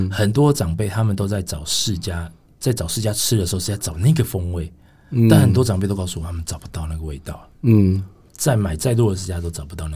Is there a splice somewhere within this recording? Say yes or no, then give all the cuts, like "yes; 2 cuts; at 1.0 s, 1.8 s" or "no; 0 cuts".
yes; 2 cuts; at 2.5 s, 7.5 s